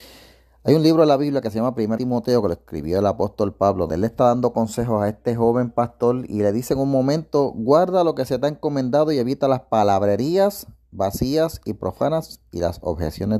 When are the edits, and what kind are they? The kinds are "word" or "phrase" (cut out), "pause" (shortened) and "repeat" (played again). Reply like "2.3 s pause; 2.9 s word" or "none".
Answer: 2.0 s word; 3.9 s word